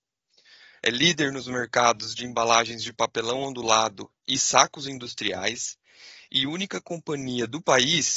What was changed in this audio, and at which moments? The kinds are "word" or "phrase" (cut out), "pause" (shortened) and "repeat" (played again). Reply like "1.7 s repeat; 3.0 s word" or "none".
4.2 s pause